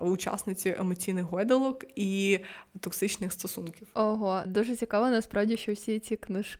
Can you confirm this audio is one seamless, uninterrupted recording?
no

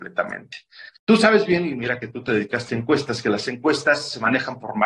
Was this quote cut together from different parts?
yes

